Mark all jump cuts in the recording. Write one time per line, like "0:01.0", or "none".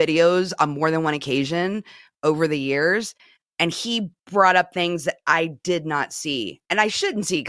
none